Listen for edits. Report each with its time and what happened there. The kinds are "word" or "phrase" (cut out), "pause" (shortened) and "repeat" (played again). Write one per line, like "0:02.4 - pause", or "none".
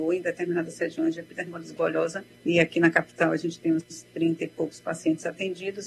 0:02.3 - pause